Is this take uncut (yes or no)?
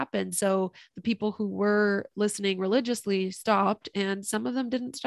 yes